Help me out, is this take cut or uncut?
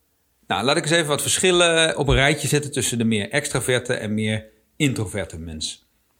uncut